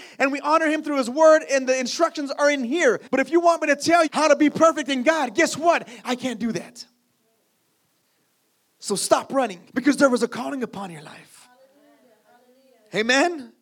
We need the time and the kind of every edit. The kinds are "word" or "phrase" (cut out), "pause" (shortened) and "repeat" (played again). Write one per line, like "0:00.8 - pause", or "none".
0:03.1 - pause
0:04.1 - word
0:09.7 - pause

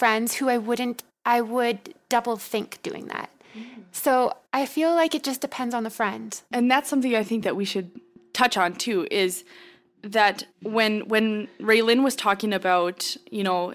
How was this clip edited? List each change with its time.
0:01.1 - pause
0:04.5 - pause
0:06.5 - pause
0:10.5 - pause

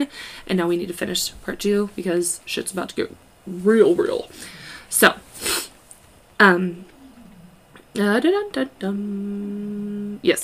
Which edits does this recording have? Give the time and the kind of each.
none

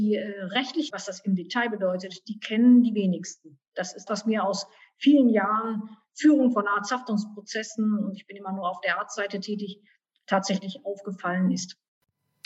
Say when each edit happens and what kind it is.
0:00.9 - word
0:04.1 - word

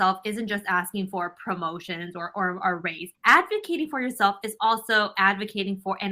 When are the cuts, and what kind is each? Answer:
0:03.2 - pause

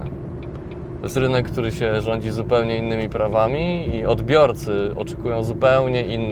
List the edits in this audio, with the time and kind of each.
none

